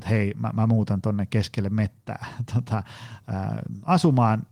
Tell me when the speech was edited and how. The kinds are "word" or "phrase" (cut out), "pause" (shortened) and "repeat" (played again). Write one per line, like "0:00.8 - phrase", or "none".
none